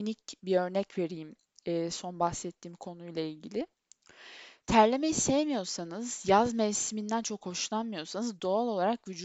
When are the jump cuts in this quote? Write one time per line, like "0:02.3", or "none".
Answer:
none